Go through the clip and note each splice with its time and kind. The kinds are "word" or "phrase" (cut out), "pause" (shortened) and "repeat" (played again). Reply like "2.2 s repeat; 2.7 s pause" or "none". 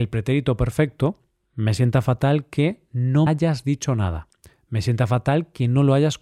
3.3 s word